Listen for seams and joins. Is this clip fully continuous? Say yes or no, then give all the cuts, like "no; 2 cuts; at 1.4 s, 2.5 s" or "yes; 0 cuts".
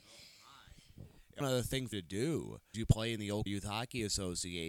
no; 4 cuts; at 1.4 s, 1.9 s, 2.7 s, 3.5 s